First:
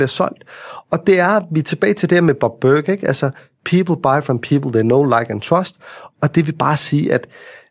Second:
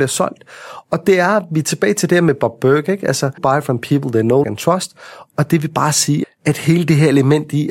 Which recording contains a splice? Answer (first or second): second